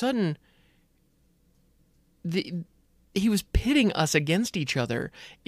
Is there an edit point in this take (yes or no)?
no